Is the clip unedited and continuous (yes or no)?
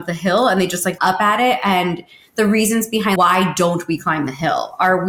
no